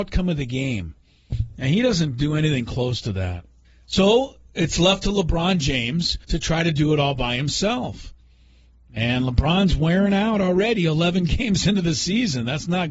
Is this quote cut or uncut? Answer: cut